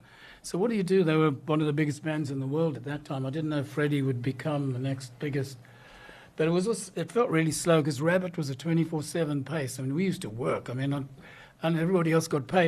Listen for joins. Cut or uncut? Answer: uncut